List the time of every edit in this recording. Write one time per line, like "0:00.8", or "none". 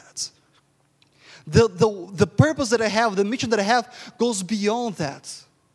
none